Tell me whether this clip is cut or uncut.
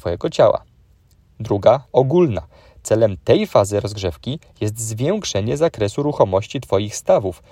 cut